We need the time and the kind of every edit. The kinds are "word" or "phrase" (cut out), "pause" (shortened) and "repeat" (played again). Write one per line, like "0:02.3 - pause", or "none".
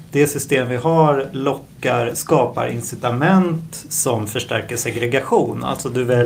none